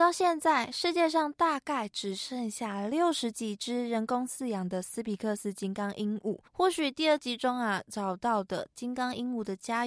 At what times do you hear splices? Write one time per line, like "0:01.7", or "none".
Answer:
0:06.5